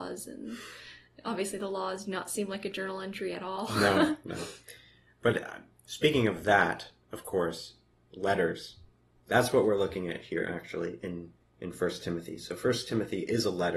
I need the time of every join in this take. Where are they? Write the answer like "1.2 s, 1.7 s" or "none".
none